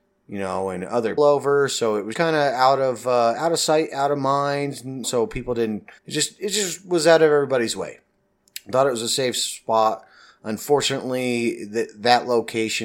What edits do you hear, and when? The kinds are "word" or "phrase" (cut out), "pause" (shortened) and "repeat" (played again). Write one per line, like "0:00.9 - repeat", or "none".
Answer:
0:01.2 - word
0:02.1 - word
0:05.0 - word
0:06.0 - pause